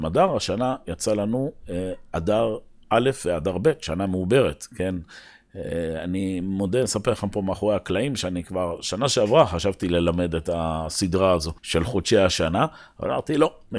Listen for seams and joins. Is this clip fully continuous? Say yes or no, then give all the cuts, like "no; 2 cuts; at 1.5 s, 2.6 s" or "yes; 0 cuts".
no; 1 cut; at 11.6 s